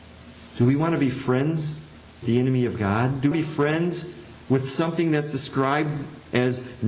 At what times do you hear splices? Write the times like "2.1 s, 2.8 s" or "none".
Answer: 2.2 s, 3.3 s